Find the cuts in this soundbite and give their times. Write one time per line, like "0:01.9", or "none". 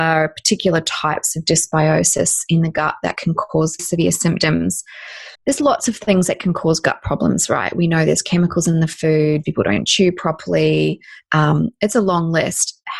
0:03.8
0:05.4
0:09.4